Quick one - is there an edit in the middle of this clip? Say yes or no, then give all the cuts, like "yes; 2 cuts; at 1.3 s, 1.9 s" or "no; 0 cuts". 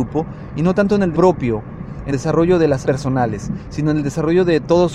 yes; 3 cuts; at 1.1 s, 2.1 s, 2.8 s